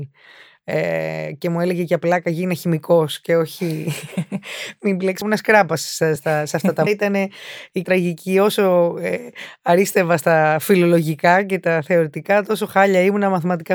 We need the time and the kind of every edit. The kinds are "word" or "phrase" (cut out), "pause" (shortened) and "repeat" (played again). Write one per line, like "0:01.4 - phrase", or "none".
0:05.2 - phrase
0:06.2 - word
0:06.9 - word
0:07.8 - word